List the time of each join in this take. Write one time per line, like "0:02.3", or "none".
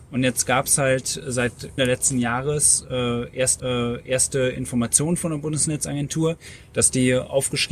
0:01.8
0:03.6